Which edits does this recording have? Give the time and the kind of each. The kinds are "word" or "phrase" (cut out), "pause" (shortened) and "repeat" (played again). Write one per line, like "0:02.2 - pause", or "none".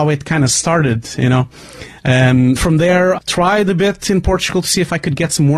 0:02.6 - word
0:03.2 - word

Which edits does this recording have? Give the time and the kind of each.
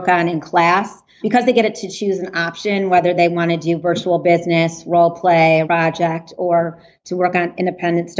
0:01.2 - word
0:05.6 - word

